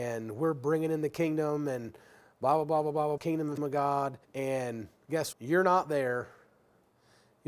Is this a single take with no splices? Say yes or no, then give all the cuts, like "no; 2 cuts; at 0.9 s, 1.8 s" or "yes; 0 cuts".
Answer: no; 4 cuts; at 3.2 s, 3.6 s, 4.2 s, 5.3 s